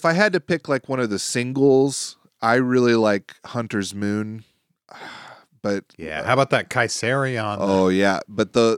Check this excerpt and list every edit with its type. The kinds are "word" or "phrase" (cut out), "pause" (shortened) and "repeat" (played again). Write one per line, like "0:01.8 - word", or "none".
none